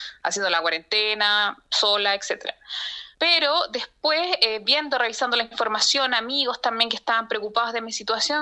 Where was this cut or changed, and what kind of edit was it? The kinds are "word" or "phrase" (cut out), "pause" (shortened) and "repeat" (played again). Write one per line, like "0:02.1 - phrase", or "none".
0:03.1 - pause